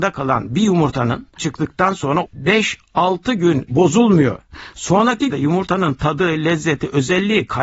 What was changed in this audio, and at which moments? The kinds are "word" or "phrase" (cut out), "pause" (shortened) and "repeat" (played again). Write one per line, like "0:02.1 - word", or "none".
0:01.4 - word
0:02.3 - word
0:03.7 - word
0:05.3 - word

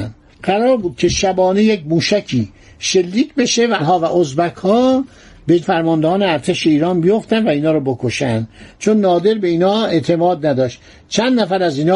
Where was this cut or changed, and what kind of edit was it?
0:03.8 - word
0:05.6 - word

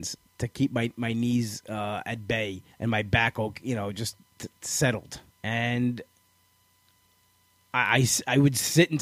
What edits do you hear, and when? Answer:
0:02.7 - pause
0:05.3 - pause

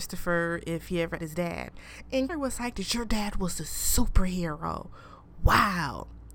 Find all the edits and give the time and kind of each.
0:01.2 - phrase
0:02.3 - word

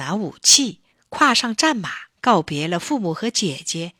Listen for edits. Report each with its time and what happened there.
0:00.9 - pause
0:02.1 - pause

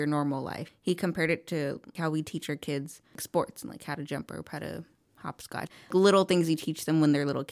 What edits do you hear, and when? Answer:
none

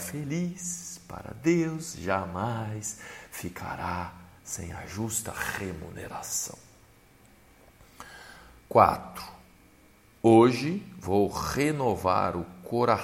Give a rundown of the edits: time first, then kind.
0:04.4 - pause
0:08.6 - pause

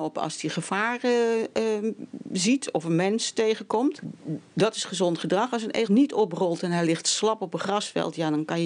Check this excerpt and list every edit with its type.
0:05.9 - word

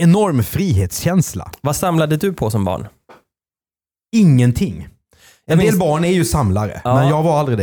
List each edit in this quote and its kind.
none

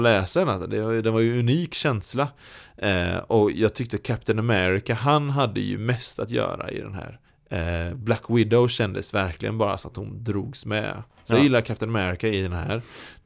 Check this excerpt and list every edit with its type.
0:07.3 - pause

